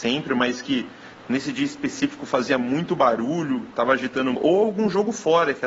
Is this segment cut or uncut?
cut